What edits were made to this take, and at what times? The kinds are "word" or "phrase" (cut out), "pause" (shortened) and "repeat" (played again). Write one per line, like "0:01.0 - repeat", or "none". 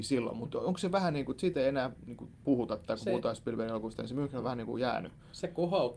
none

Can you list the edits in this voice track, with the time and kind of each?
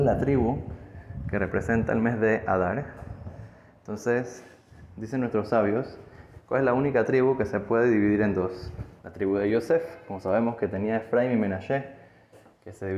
0:09.0 - pause

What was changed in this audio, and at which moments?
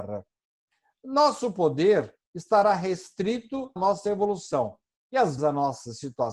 0:02.2 - pause
0:03.8 - word
0:04.9 - pause
0:05.4 - word

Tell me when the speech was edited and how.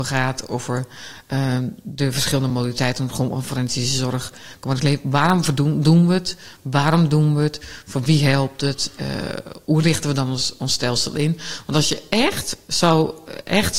none

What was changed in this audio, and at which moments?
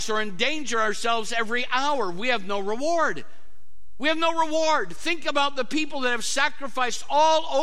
none

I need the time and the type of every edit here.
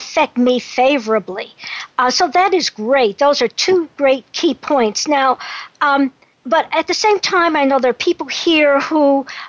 0:06.3 - pause

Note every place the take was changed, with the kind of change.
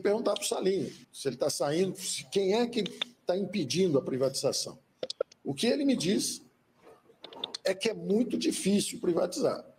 0:01.0 - pause

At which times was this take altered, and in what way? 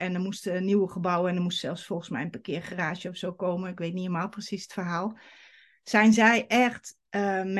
none

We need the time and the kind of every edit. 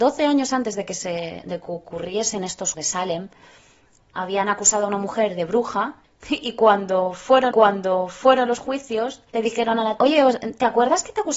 0:02.7 - word
0:04.0 - word
0:06.0 - pause
0:07.5 - repeat
0:09.3 - pause
0:10.0 - word

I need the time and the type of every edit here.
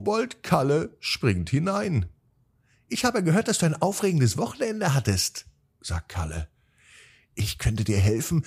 none

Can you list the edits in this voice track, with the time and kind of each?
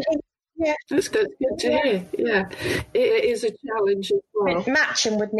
0:01.1 - word
0:03.1 - phrase

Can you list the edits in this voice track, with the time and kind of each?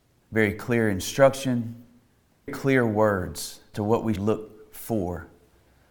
0:02.5 - word
0:03.7 - word
0:04.2 - word

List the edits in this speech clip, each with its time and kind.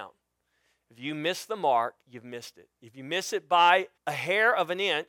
0:02.0 - pause
0:04.0 - pause

